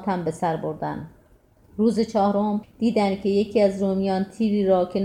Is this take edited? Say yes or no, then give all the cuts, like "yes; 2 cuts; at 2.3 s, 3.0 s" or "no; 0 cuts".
no; 0 cuts